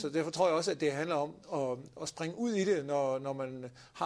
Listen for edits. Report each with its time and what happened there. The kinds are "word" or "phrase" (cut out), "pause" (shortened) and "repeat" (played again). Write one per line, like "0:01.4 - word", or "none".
0:01.4 - pause